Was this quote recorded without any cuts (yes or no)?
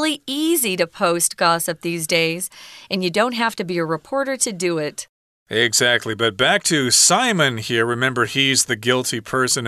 yes